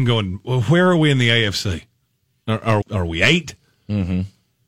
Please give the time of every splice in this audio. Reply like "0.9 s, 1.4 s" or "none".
2.8 s